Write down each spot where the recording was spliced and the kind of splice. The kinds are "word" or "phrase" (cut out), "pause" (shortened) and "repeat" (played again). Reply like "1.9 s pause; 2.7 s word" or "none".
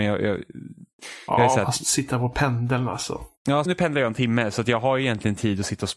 3.7 s word